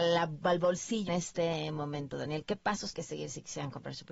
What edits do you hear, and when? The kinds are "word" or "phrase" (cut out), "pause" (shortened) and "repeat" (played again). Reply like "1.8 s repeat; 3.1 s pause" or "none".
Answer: 1.1 s word; 2.9 s word